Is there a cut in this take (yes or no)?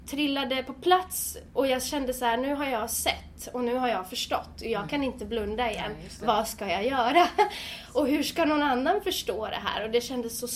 no